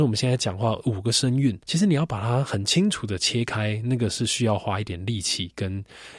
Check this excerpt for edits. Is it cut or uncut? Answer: cut